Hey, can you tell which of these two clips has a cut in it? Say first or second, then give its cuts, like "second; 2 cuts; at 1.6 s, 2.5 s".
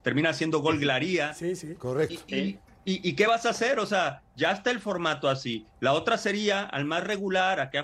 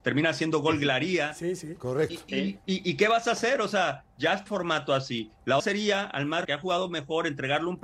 second; 4 cuts; at 2.6 s, 4.5 s, 5.6 s, 6.4 s